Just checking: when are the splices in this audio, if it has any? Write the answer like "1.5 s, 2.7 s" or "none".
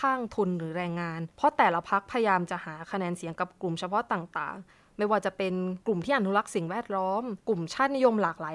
1.3 s, 5.8 s, 7.4 s